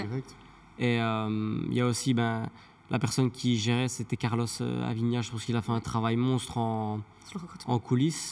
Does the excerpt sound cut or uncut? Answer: uncut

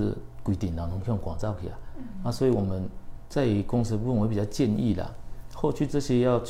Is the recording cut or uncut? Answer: uncut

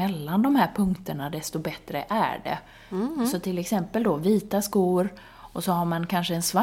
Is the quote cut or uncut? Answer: uncut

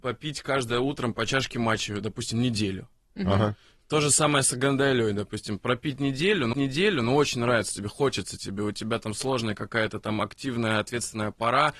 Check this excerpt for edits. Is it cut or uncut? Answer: cut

